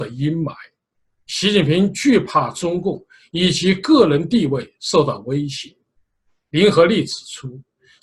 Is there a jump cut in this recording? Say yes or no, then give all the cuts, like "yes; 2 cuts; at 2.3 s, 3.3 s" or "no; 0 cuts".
no; 0 cuts